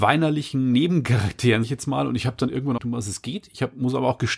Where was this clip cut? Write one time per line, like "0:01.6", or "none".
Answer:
0:01.6
0:02.8